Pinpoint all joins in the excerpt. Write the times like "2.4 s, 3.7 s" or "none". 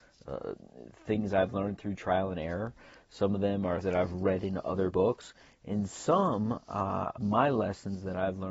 3.8 s, 4.9 s, 7.2 s